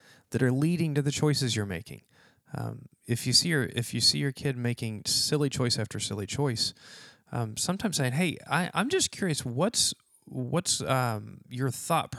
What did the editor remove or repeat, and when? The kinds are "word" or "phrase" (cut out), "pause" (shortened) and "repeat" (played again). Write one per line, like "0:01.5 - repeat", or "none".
none